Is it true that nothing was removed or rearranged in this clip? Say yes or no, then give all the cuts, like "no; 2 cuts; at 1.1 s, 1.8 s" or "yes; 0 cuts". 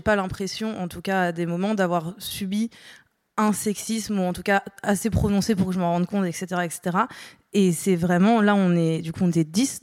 yes; 0 cuts